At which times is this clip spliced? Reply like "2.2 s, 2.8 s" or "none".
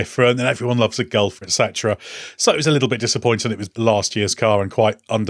1.4 s, 3.7 s